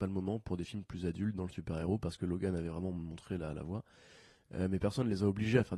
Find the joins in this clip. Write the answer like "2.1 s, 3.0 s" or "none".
none

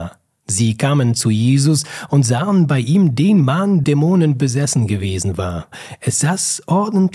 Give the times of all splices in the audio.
3.8 s

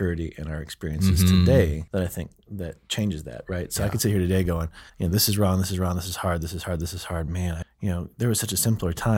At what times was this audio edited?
1.9 s, 4.9 s, 7.6 s

